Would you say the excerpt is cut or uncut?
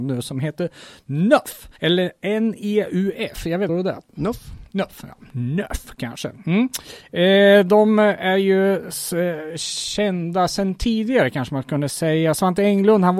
cut